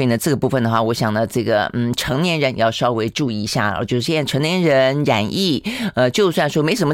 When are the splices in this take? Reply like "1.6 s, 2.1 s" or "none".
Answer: none